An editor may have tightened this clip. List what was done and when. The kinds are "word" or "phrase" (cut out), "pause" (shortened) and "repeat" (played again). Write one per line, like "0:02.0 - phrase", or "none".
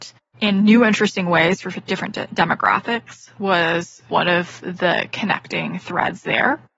none